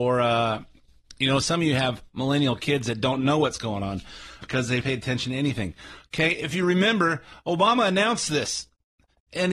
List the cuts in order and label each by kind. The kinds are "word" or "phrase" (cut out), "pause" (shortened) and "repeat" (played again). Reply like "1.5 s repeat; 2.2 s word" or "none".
4.4 s word; 4.8 s word

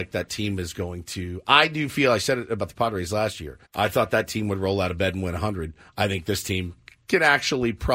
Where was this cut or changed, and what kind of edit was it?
3.6 s pause

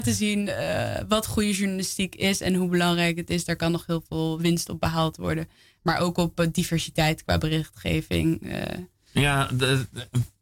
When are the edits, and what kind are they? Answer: none

